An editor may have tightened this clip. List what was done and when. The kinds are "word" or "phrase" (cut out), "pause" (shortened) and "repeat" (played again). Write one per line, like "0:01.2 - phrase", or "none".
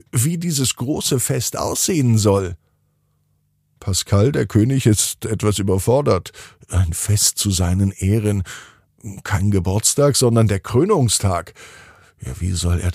none

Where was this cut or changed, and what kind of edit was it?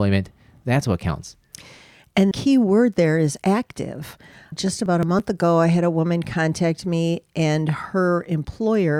0:02.3 - word

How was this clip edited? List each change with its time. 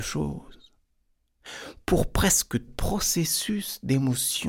0:02.7 - phrase

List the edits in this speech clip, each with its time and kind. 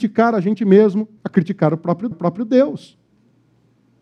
0:01.2 - pause
0:02.1 - repeat

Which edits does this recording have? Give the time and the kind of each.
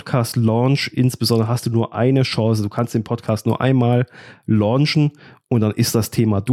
none

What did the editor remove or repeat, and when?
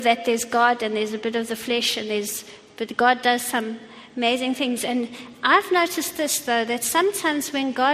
none

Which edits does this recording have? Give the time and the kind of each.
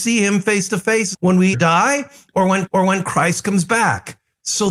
0:01.1 - word
0:01.5 - word
0:02.7 - repeat

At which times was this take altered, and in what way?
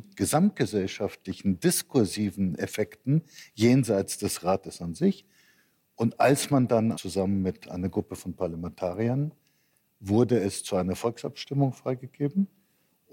0:06.9 - phrase

